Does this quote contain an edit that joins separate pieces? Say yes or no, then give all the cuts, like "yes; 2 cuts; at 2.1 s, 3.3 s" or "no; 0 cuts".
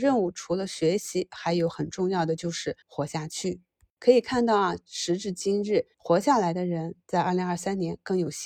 yes; 2 cuts; at 2.8 s, 5.9 s